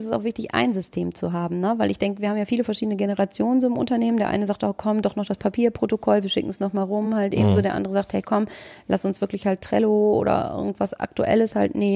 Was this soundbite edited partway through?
no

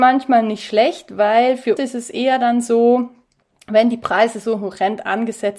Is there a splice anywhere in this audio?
yes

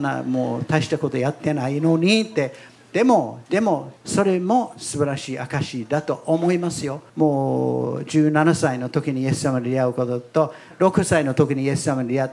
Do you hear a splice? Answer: yes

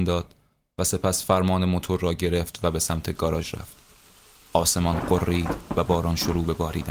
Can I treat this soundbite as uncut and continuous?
yes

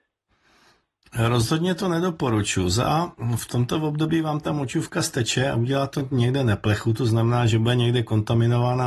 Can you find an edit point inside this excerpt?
no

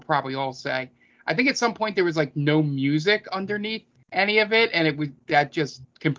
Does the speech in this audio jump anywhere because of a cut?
no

